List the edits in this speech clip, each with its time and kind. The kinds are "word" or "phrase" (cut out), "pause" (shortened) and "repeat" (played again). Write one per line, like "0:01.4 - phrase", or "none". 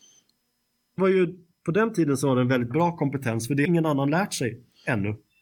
0:01.0 - word
0:03.6 - word